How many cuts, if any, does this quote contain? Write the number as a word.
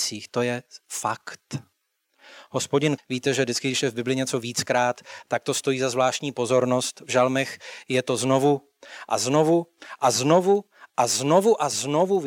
one